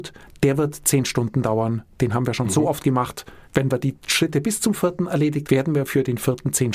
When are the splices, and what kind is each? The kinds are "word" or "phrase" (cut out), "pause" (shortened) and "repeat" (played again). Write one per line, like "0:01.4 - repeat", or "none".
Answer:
0:03.4 - pause
0:05.4 - word